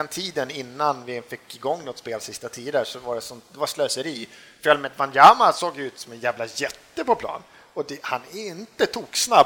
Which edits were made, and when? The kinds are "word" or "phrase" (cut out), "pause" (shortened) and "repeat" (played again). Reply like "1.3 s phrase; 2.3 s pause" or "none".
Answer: none

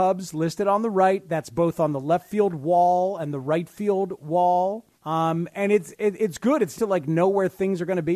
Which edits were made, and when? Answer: 4.9 s pause; 6.8 s word

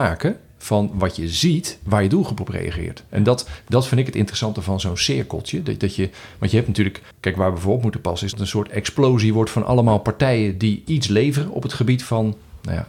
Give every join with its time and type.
7.1 s pause; 8.3 s word

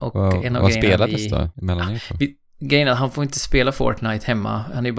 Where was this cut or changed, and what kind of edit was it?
1.5 s pause

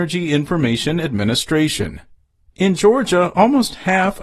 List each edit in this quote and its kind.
none

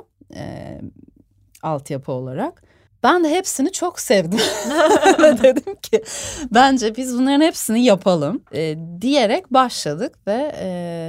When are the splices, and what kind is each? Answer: 2.9 s pause; 8.5 s pause

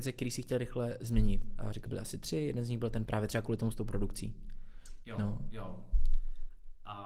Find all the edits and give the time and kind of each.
1.9 s phrase; 3.1 s word; 3.7 s word

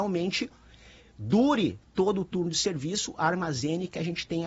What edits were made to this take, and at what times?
none

